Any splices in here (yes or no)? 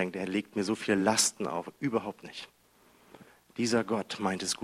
no